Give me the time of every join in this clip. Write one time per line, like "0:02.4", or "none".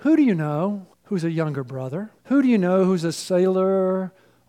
0:00.9
0:02.2